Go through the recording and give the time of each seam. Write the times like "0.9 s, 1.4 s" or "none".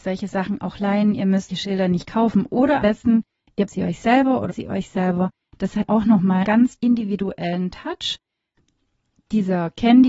1.5 s, 2.8 s, 3.7 s, 4.5 s, 5.9 s, 6.4 s, 6.8 s